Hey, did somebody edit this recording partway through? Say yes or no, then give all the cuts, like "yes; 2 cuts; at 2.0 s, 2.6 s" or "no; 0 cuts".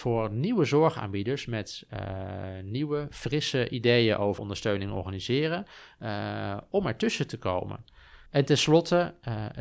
yes; 2 cuts; at 4.4 s, 8.3 s